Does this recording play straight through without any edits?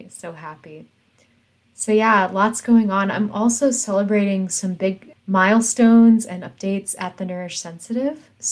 yes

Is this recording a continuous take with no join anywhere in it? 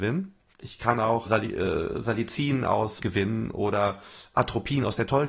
no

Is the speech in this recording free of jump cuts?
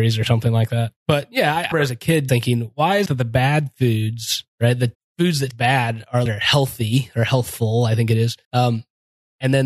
no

